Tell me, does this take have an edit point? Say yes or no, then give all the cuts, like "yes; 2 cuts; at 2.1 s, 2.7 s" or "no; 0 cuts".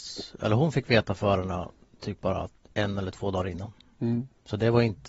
no; 0 cuts